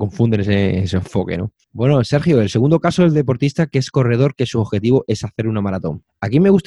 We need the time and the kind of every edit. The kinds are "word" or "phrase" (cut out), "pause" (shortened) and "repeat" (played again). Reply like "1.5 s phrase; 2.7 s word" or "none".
none